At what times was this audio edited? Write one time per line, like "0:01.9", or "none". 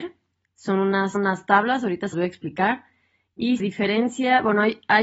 0:01.1
0:02.1
0:03.6